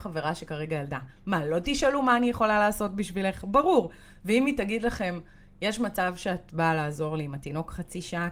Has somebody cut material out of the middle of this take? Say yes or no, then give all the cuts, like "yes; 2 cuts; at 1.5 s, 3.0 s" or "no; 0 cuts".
no; 0 cuts